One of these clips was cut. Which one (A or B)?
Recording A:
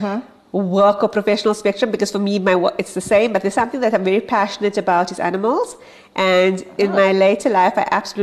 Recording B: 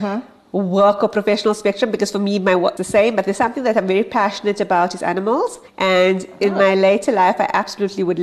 B